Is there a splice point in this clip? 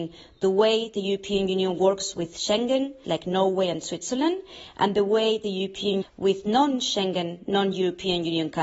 yes; 2 cuts; at 3.0 s, 6.0 s

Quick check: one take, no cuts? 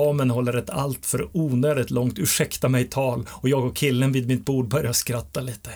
yes; 0 cuts

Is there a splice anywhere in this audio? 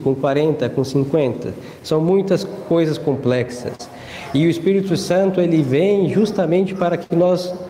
no; 0 cuts

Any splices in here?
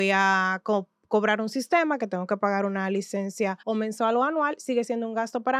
yes; 1 cut; at 3.6 s

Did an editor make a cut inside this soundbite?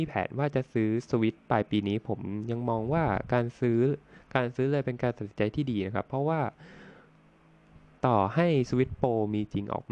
no; 0 cuts

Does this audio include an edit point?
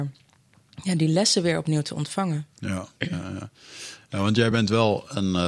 no; 0 cuts

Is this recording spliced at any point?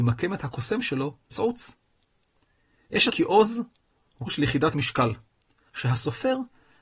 yes; 4 cuts; at 1.3 s, 3.1 s, 4.3 s, 5.7 s

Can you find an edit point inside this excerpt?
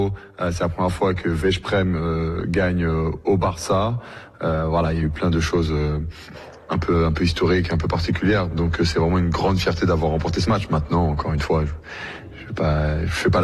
no; 0 cuts

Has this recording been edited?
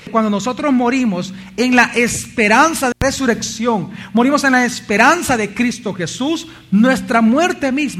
yes; 1 cut; at 2.9 s

